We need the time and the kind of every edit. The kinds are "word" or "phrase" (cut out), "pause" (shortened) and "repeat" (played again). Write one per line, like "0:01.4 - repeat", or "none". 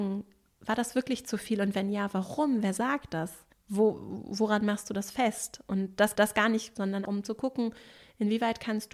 0:03.5 - pause
0:06.1 - repeat
0:06.8 - phrase
0:07.1 - word